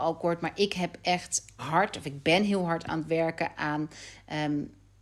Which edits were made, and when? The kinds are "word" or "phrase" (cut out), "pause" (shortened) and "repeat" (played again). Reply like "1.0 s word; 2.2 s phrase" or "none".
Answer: 1.6 s word